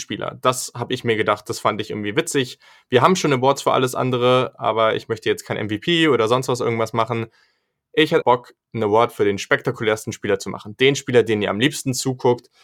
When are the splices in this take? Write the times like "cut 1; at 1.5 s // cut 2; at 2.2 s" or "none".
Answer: cut 1; at 8.2 s